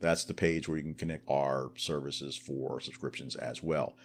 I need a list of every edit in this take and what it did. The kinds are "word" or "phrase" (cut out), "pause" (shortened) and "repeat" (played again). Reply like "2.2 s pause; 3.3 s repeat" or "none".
1.2 s word